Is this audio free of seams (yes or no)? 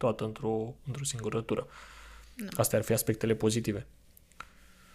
yes